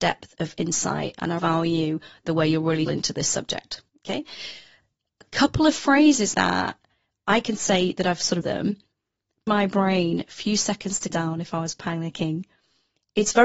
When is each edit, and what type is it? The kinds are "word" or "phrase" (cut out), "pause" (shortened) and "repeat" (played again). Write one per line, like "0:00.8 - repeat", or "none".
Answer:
0:01.4 - word
0:02.9 - phrase
0:03.9 - pause
0:06.3 - word
0:08.4 - phrase
0:09.5 - phrase
0:11.1 - word